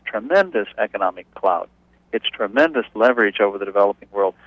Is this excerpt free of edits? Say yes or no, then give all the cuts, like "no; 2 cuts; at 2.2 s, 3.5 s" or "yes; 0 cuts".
yes; 0 cuts